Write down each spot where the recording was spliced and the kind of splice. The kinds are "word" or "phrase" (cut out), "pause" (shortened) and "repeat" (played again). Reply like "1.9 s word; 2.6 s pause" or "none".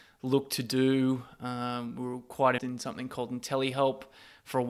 2.6 s word